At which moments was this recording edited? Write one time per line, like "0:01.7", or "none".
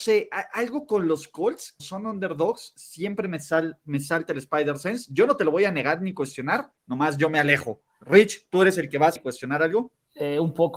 0:01.8
0:06.8
0:09.2

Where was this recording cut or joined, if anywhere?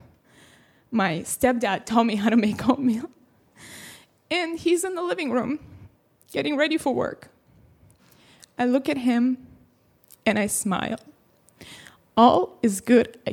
none

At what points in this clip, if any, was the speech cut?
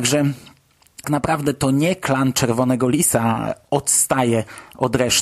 0:01.0

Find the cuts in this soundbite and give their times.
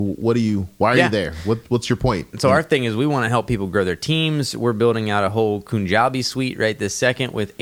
none

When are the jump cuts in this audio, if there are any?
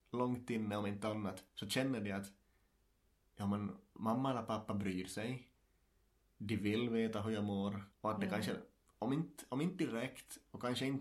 0:01.5
0:07.9

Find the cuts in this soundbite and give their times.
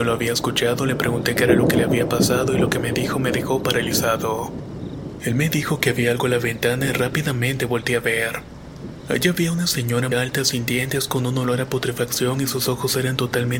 0:10.1

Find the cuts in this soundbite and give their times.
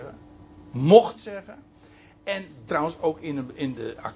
0:01.2
0:02.7

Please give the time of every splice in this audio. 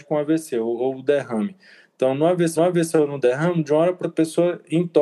0:02.6
0:04.0

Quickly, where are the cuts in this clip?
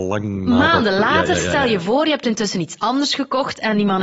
none

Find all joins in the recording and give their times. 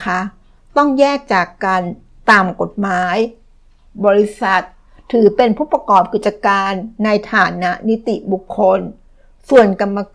none

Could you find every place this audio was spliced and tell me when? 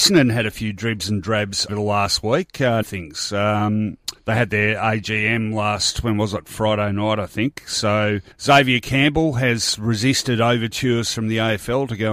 0:01.7
0:02.8
0:04.2
0:08.3

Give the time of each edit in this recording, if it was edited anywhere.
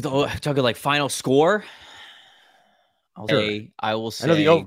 0:03.3

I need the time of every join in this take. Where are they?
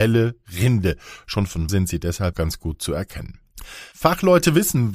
0:01.7
0:02.3
0:03.9

